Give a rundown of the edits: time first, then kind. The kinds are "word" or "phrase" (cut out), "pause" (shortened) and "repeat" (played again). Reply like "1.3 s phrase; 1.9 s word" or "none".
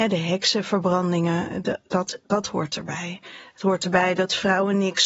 none